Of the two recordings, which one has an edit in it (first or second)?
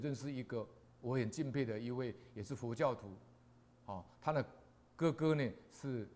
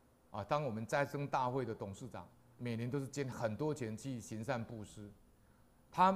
second